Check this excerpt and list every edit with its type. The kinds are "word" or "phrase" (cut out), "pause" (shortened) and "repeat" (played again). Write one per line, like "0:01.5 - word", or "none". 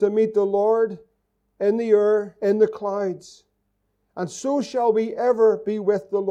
none